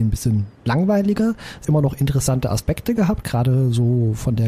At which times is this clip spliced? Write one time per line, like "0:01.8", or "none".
0:01.6